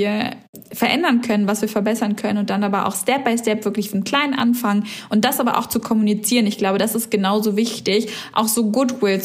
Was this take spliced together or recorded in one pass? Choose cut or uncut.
uncut